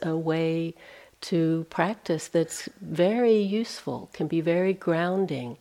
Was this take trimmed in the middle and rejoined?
no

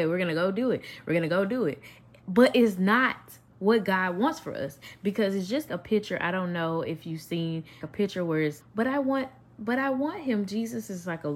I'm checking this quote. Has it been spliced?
yes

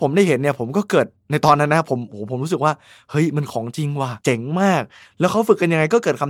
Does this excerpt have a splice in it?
yes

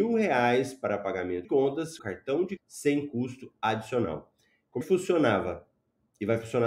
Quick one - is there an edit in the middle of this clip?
yes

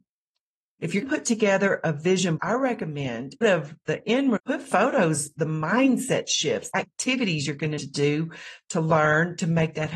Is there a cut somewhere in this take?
yes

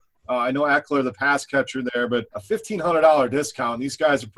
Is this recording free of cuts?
no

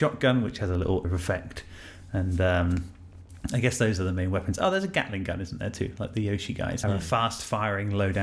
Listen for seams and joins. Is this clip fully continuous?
no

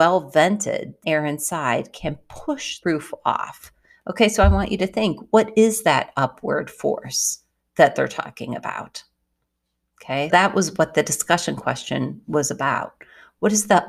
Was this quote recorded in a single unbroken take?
no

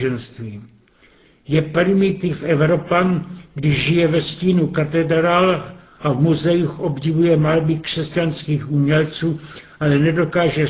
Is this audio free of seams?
yes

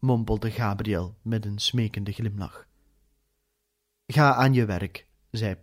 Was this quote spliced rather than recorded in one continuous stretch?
no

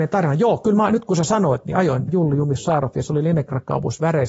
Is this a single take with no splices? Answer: no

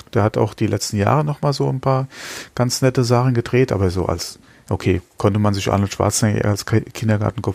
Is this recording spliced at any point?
no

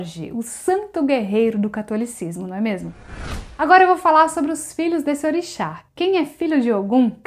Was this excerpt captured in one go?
no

